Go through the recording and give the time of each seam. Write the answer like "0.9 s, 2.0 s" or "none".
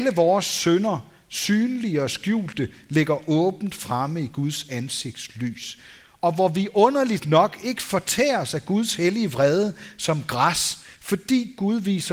none